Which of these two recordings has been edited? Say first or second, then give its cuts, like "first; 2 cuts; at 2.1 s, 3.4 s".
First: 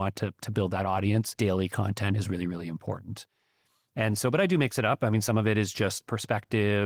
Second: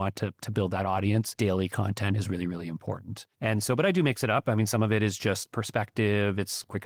second; 1 cut; at 3.3 s